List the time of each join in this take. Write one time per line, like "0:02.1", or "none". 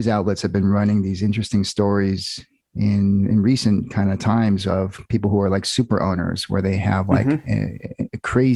none